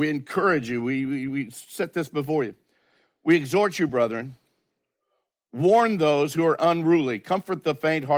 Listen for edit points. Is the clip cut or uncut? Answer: uncut